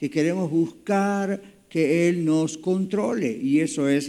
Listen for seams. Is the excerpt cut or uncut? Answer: uncut